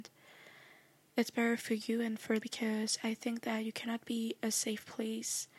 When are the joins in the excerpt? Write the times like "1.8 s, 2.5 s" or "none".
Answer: 2.4 s